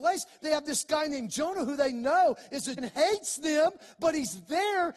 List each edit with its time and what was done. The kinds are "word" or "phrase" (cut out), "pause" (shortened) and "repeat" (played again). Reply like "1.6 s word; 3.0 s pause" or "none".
2.8 s word